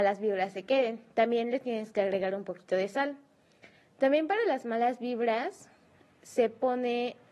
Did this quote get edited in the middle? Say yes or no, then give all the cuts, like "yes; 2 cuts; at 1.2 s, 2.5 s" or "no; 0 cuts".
no; 0 cuts